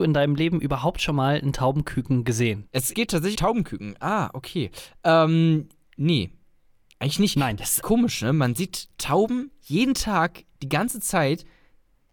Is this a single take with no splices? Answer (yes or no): no